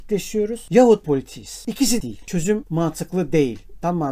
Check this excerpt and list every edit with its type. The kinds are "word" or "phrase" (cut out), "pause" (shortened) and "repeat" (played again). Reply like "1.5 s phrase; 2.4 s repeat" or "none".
1.0 s phrase; 2.0 s word; 2.6 s phrase